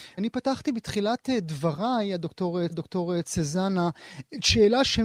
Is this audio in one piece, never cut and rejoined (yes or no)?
no